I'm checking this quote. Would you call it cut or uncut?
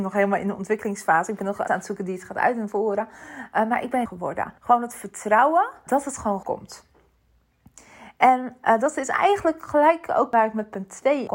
cut